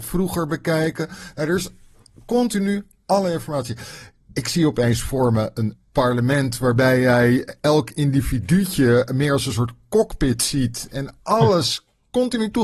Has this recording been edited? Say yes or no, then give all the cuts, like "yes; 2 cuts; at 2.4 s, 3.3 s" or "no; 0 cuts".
no; 0 cuts